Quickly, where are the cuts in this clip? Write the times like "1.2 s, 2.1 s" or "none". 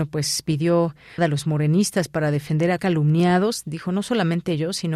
1.2 s, 2.8 s